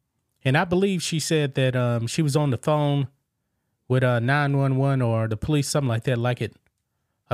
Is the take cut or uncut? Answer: uncut